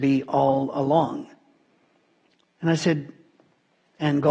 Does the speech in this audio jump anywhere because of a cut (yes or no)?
no